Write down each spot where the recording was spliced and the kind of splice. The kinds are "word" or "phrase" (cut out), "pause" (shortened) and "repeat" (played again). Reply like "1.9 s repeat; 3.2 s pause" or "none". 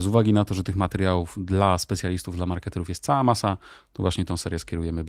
none